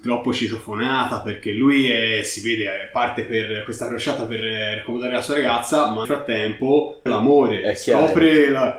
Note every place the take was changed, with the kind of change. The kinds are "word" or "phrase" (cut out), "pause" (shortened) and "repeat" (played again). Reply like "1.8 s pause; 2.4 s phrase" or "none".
6.0 s word; 7.1 s word